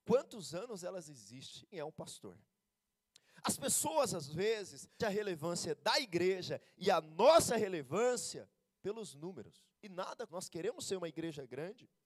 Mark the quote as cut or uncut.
cut